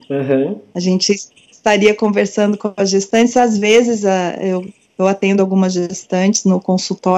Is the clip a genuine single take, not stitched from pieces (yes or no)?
yes